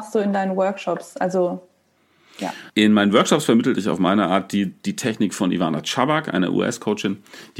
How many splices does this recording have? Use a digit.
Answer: 1